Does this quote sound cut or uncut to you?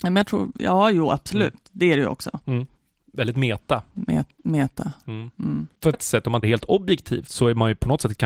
cut